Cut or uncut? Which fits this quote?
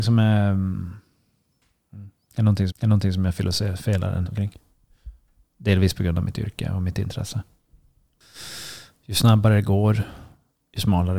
cut